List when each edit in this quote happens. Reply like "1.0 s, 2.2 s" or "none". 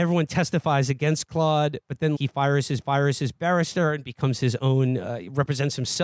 2.2 s, 2.8 s